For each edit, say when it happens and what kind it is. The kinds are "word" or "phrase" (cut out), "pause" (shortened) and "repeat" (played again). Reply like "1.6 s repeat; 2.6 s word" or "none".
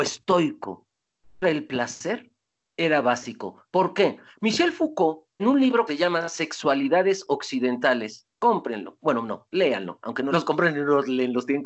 1.4 s word; 5.4 s word; 5.9 s phrase; 8.3 s pause; 10.3 s phrase